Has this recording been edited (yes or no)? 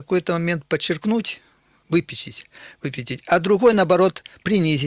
no